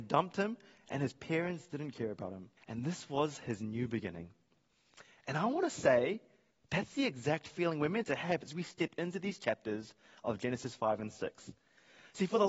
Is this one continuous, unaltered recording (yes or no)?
no